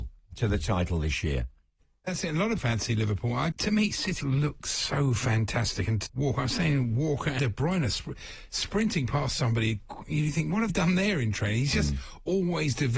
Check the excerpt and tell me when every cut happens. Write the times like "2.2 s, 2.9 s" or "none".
2.6 s, 3.5 s, 4.2 s, 6.1 s, 7.4 s, 10.7 s